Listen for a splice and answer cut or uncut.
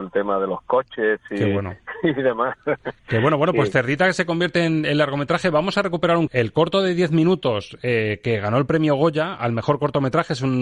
cut